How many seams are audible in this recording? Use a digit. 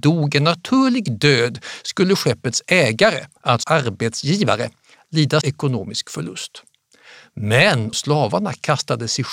3